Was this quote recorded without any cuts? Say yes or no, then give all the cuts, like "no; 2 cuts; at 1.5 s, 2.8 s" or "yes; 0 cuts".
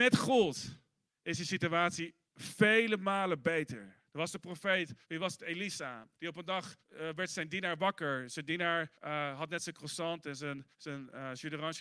no; 8 cuts; at 1.1 s, 2.2 s, 4.1 s, 5.0 s, 6.1 s, 6.8 s, 8.9 s, 10.7 s